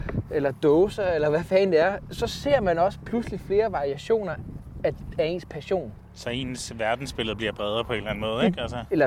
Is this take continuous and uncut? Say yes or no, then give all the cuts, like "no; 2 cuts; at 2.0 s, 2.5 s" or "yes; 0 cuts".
yes; 0 cuts